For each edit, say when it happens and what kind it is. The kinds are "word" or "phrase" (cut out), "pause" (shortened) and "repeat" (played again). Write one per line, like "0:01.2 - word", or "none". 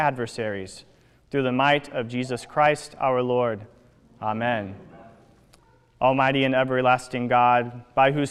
none